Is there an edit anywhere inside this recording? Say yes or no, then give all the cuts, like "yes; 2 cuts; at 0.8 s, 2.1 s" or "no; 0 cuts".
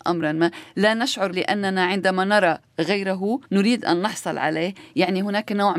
yes; 2 cuts; at 1.3 s, 3.5 s